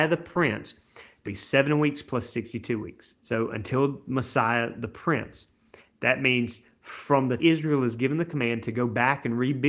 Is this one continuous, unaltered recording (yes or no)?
no